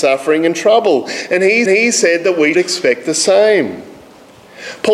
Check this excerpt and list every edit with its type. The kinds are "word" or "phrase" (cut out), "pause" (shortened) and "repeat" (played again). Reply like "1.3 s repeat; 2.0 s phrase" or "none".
1.7 s repeat; 2.5 s word